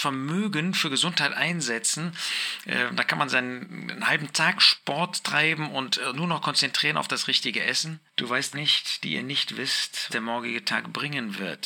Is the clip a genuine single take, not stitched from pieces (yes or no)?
no